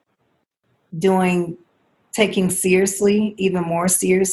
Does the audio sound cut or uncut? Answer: uncut